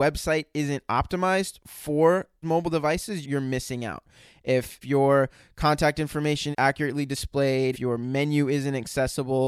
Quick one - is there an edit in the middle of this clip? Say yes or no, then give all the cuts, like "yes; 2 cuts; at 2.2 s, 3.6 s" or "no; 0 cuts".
yes; 5 cuts; at 2.4 s, 3.2 s, 4.8 s, 6.5 s, 7.7 s